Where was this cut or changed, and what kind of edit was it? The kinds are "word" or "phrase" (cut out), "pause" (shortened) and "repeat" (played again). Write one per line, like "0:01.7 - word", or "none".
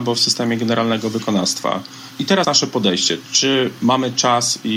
0:02.4 - word